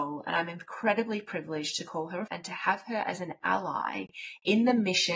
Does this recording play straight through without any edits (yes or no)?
no